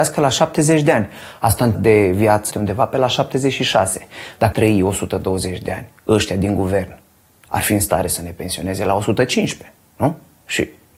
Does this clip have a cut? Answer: yes; 4 cuts; at 1.7 s, 2.5 s, 4.5 s, 6.0 s

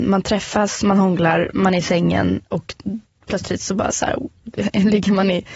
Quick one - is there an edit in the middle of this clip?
no; 0 cuts

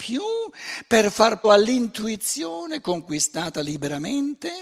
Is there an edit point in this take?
yes; 1 cut; at 1.4 s

